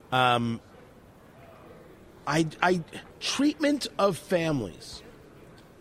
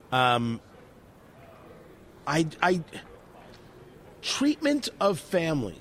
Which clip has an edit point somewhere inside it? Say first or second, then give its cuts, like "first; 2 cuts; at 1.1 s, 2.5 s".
first; 1 cut; at 3.1 s